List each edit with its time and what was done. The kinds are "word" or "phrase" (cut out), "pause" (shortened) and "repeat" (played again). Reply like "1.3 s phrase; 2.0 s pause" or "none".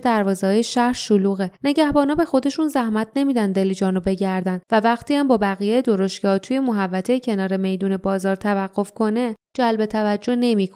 1.6 s pause; 4.6 s pause; 9.4 s pause